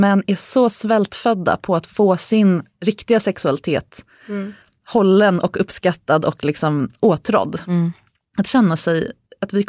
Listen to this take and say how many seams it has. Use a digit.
0